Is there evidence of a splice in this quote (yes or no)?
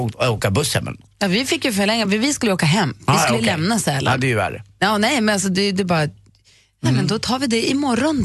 no